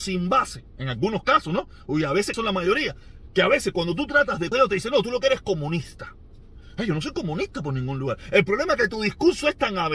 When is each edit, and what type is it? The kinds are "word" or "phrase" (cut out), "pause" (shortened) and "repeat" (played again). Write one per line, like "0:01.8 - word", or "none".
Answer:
0:02.3 - phrase
0:04.5 - phrase